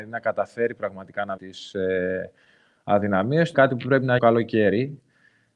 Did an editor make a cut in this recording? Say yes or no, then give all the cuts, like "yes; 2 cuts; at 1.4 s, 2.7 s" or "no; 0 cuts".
yes; 3 cuts; at 1.4 s, 3.5 s, 4.2 s